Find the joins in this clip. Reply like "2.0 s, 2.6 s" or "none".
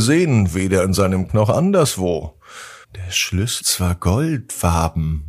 1.3 s, 2.8 s, 3.6 s